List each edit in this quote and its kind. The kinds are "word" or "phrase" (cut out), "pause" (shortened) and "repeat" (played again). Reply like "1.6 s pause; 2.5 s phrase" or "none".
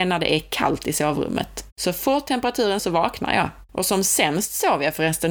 1.7 s pause; 2.8 s word; 3.7 s pause